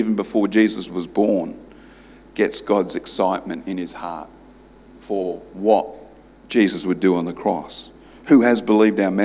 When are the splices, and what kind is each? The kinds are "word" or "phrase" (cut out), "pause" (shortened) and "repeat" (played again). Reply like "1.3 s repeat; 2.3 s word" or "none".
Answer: none

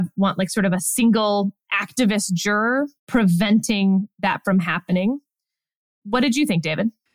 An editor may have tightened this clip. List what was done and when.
3.0 s pause

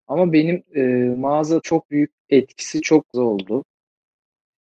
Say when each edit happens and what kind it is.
1.6 s phrase; 2.2 s word; 3.1 s word

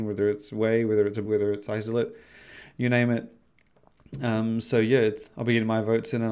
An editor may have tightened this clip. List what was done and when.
1.2 s word; 5.3 s word

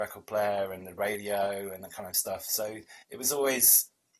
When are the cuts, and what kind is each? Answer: 3.0 s pause

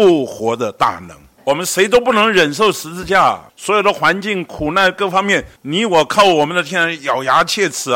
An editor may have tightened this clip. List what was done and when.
1.4 s pause; 3.5 s pause; 5.6 s pause

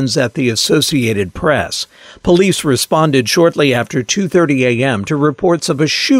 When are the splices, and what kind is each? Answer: none

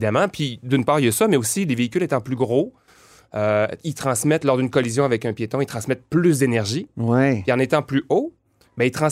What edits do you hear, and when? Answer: none

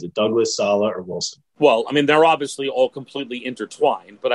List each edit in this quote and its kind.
1.5 s pause

